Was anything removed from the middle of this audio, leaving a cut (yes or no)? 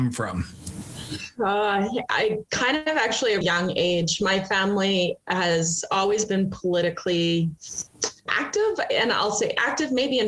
yes